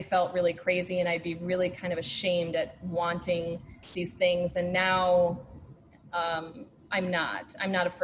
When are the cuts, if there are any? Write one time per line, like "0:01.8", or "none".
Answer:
none